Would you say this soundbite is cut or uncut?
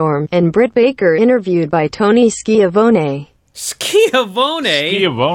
uncut